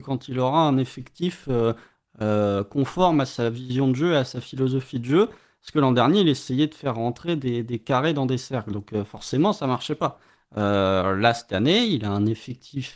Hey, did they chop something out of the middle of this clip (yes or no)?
no